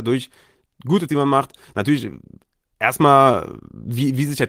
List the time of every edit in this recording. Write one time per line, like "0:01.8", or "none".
0:01.1